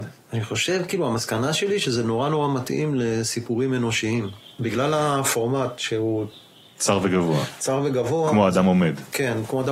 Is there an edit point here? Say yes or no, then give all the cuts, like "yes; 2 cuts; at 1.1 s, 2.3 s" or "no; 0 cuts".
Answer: no; 0 cuts